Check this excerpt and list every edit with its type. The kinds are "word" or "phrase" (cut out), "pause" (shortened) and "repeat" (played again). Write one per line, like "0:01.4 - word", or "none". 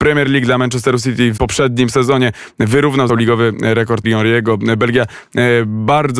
0:01.4 - word
0:03.1 - word
0:04.0 - word